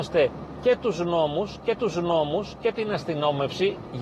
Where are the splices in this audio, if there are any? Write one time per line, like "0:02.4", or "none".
0:01.8